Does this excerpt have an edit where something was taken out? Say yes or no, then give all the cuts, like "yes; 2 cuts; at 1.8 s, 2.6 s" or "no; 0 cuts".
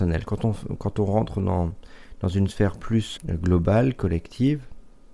yes; 1 cut; at 3.2 s